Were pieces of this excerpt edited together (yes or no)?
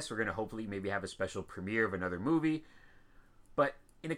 no